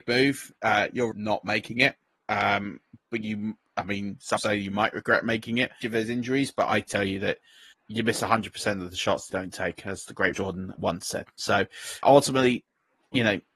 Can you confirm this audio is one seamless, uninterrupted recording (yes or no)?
no